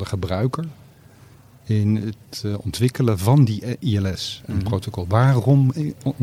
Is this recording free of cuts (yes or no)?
yes